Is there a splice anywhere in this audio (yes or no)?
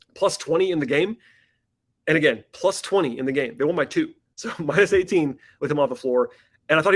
no